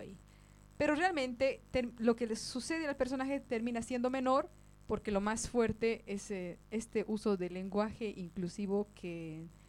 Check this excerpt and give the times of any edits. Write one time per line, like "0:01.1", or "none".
none

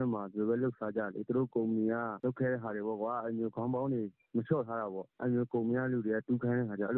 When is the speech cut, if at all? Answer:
none

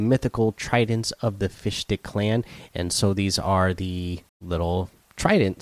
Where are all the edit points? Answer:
0:04.3

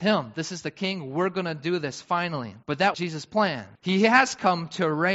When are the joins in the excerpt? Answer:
0:02.6
0:02.9
0:03.8

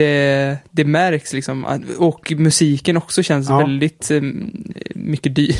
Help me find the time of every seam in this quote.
none

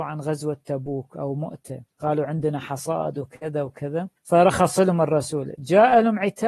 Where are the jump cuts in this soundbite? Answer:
none

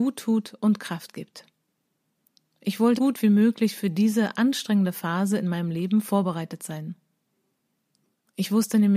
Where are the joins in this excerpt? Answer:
0:03.0

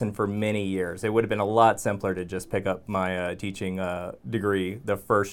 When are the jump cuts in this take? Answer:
0:04.2

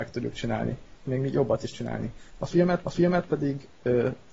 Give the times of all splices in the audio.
0:01.1
0:01.7
0:02.8

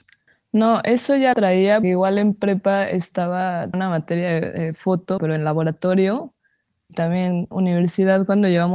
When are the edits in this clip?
0:01.3
0:01.8
0:03.7
0:05.2
0:06.9
0:07.5

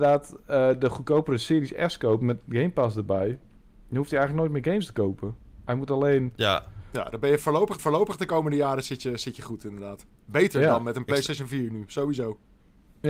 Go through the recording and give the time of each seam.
0:07.8

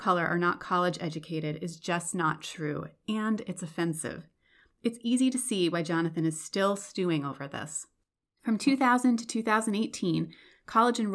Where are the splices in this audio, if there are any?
0:08.1

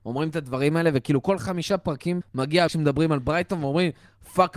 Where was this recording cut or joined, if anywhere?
0:02.2
0:02.7

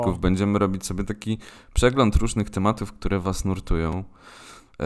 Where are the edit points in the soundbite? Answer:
none

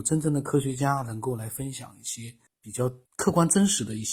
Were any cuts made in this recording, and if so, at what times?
0:02.5
0:03.1

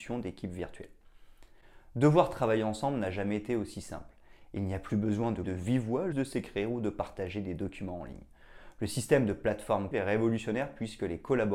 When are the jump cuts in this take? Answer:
0:05.4
0:06.1
0:09.9

